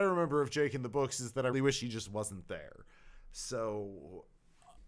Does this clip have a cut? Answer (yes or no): yes